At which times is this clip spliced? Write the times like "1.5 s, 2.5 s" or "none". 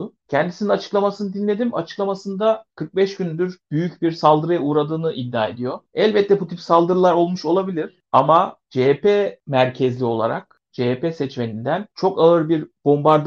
none